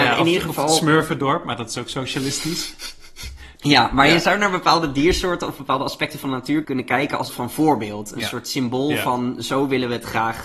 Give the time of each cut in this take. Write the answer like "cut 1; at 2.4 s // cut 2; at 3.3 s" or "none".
cut 1; at 3.6 s // cut 2; at 6.6 s // cut 3; at 7.3 s

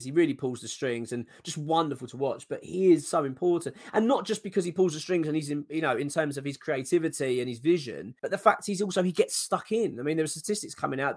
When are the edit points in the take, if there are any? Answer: cut 1; at 8.2 s

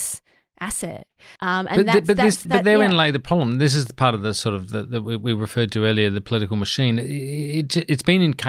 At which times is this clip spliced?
cut 1; at 1.4 s // cut 2; at 2.4 s

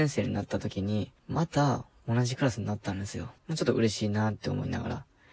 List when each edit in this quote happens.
cut 1; at 1.2 s // cut 2; at 3.4 s

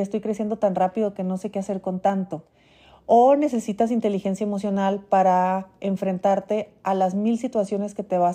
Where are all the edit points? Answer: none

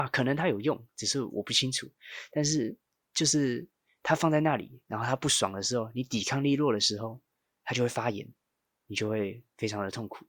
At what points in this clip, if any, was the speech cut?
none

